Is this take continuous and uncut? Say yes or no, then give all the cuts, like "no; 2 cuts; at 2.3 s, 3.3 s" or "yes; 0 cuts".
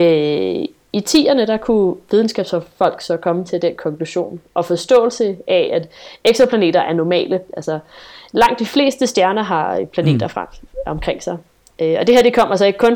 yes; 0 cuts